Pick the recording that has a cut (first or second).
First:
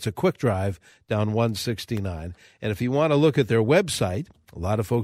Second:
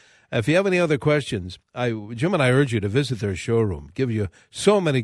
second